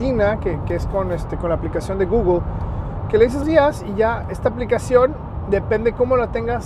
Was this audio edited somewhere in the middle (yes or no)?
yes